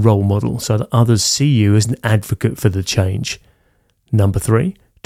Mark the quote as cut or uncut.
uncut